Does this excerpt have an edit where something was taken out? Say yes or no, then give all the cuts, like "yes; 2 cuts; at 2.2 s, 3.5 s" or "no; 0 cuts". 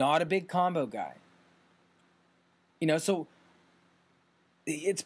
no; 0 cuts